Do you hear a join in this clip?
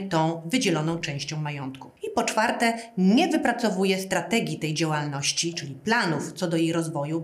no; 0 cuts

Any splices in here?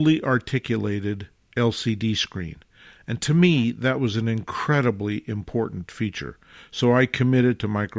no; 0 cuts

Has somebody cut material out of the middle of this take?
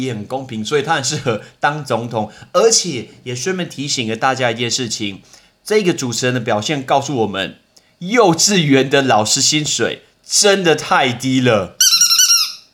no; 0 cuts

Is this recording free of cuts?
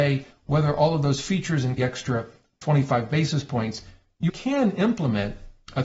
no; 2 cuts; at 1.8 s, 4.3 s

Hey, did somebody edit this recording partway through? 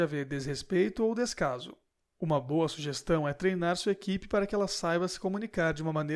no; 0 cuts

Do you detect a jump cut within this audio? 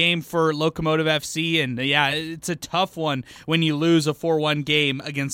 no; 0 cuts

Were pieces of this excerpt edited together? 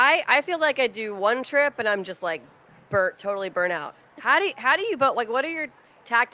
no; 0 cuts

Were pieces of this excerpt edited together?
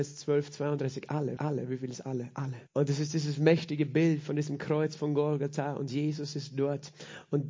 yes; 2 cuts; at 1.4 s, 2.7 s

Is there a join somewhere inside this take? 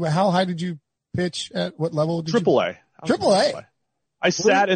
no; 0 cuts

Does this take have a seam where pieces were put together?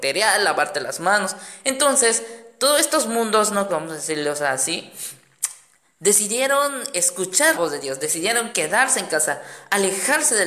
yes; 2 cuts; at 3.7 s, 7.5 s

